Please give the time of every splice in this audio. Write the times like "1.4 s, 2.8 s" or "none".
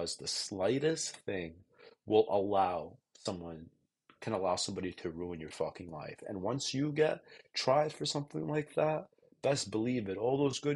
none